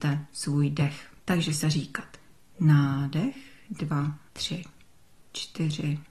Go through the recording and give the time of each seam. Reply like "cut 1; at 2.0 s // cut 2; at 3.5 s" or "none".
cut 1; at 1.2 s // cut 2; at 1.6 s // cut 3; at 4.3 s